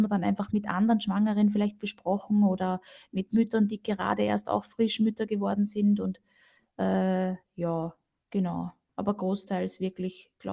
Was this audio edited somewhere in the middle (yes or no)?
no